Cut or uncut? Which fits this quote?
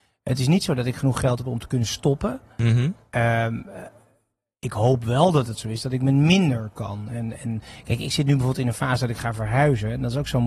uncut